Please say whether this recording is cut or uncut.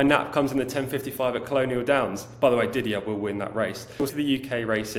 cut